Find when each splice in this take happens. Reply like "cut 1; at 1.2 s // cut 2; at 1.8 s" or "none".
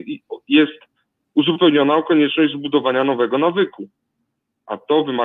none